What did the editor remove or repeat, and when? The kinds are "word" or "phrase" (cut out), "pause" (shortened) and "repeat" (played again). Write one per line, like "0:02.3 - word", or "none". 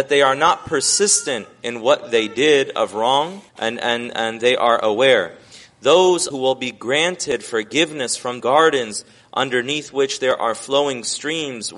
0:03.5 - pause
0:06.3 - phrase
0:08.4 - phrase